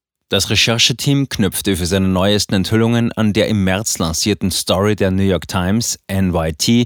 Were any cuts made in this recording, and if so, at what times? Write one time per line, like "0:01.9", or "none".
none